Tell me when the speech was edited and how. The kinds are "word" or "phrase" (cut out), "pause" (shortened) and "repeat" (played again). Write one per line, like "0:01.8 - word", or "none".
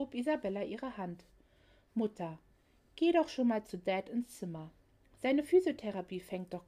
none

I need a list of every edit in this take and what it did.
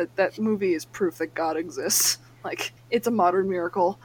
0:02.8 - pause

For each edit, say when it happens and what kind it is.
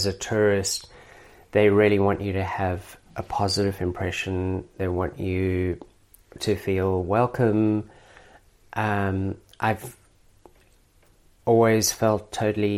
none

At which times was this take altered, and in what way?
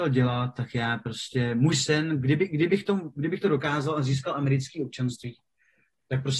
none

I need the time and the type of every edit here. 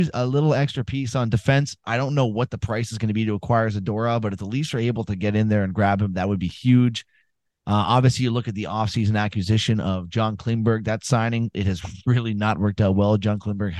none

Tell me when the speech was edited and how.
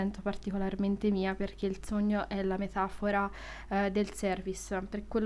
none

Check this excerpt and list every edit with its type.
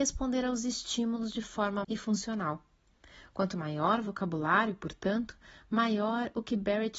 0:01.8 - phrase

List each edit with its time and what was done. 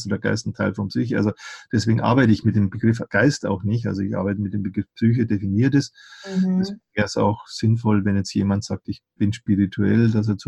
none

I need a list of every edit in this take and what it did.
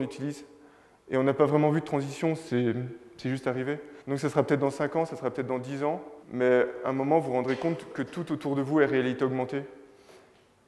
0:04.0 - pause
0:06.2 - pause

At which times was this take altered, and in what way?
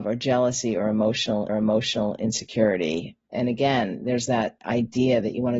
0:01.5 - repeat

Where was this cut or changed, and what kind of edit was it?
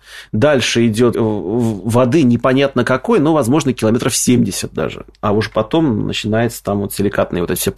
0:01.1 - word

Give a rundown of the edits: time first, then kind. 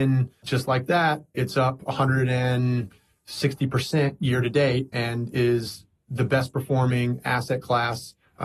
none

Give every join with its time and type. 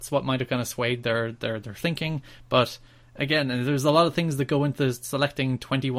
none

